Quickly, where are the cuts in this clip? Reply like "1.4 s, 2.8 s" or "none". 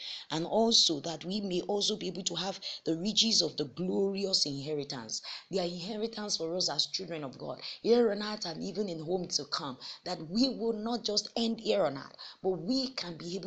none